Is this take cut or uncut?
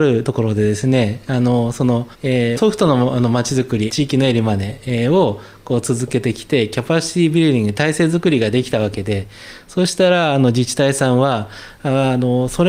cut